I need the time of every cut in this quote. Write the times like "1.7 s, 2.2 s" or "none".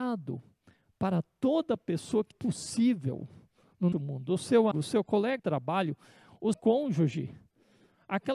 2.3 s, 3.9 s, 4.7 s, 5.4 s, 6.5 s